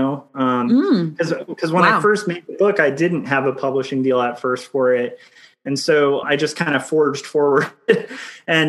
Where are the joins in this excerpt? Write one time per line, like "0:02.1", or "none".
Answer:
0:06.2